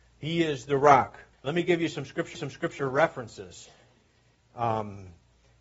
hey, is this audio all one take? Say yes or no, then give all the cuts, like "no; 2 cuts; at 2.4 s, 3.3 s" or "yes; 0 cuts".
no; 2 cuts; at 1.3 s, 2.4 s